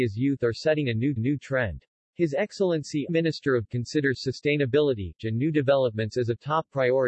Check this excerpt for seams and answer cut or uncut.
cut